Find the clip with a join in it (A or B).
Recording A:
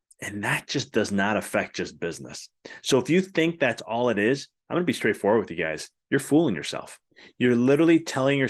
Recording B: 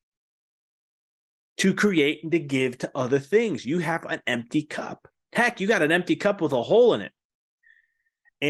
A